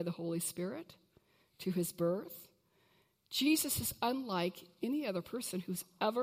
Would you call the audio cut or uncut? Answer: uncut